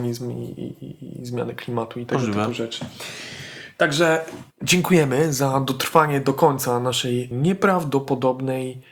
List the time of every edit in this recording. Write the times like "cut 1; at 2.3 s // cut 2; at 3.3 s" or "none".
cut 1; at 4.5 s // cut 2; at 7.3 s